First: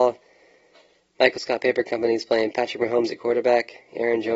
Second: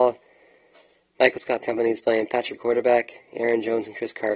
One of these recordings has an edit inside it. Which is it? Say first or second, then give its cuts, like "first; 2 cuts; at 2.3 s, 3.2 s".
second; 2 cuts; at 1.6 s, 2.5 s